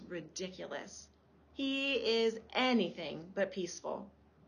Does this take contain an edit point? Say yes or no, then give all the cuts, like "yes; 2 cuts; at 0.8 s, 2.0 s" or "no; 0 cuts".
no; 0 cuts